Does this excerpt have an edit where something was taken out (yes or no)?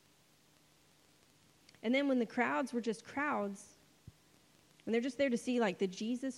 no